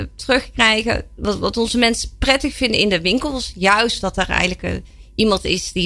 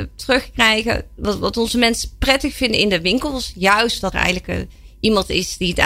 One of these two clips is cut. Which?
second; 1 cut; at 4.1 s

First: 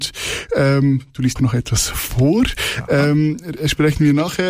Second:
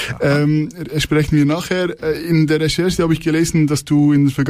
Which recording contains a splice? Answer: first; 1 cut; at 1.4 s

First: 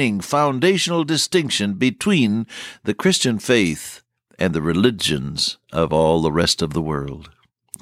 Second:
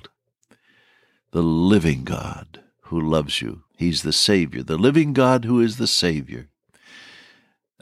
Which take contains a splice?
second; 1 cut; at 3.7 s

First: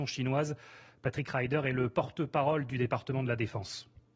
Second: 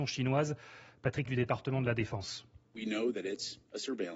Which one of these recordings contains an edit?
second; 1 cut; at 1.3 s

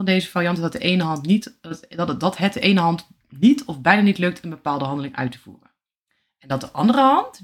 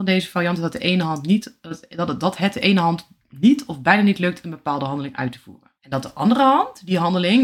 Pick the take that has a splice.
second; 1 cut; at 5.8 s

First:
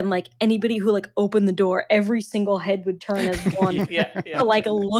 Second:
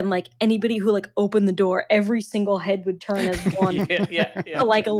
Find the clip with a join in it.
first; 1 cut; at 3.9 s

